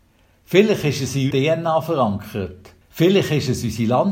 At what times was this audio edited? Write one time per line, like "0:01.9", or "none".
0:01.3
0:02.8